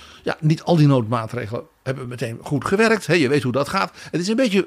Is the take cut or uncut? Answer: uncut